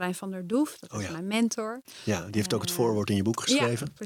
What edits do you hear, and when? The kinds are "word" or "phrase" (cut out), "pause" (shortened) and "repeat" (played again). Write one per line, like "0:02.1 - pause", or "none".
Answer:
none